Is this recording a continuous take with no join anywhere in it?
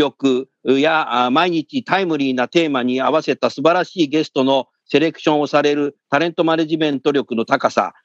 yes; 0 cuts

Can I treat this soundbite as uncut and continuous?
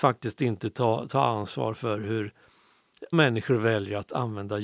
no; 1 cut; at 3.1 s

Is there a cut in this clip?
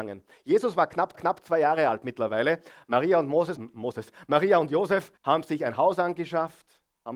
yes; 3 cuts; at 1.1 s, 3.6 s, 5.2 s

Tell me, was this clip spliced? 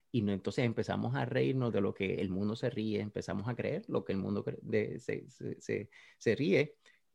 no; 0 cuts

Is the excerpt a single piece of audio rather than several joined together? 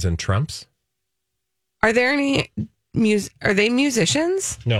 yes; 0 cuts

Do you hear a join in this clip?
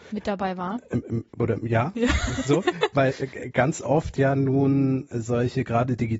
no; 0 cuts

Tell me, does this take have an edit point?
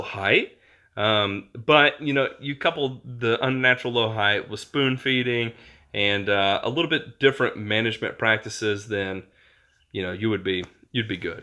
no; 0 cuts

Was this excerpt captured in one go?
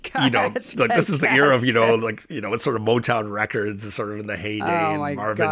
yes; 0 cuts

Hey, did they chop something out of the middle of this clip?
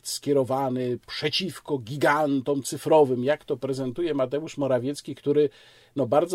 no; 0 cuts

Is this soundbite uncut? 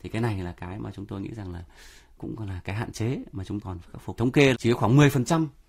no; 4 cuts; at 2.2 s, 3.6 s, 4.2 s, 4.5 s

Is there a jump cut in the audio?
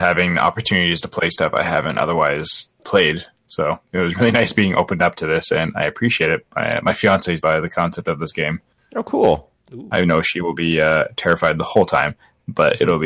yes; 3 cuts; at 2.8 s, 7.4 s, 8.7 s

